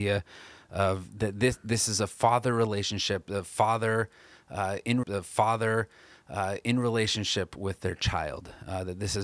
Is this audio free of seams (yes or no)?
no